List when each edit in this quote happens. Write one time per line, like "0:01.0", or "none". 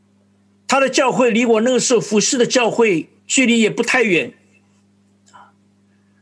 0:03.2